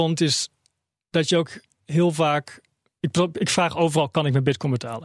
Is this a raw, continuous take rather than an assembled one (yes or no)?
yes